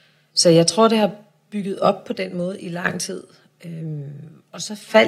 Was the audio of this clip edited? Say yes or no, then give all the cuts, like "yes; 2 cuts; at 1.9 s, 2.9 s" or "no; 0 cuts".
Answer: no; 0 cuts